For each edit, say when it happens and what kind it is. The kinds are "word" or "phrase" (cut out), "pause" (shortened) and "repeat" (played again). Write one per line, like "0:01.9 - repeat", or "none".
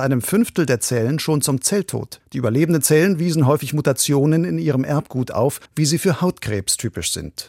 0:02.2 - pause
0:05.7 - pause